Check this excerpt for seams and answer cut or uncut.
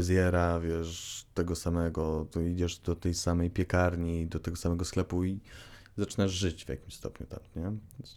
uncut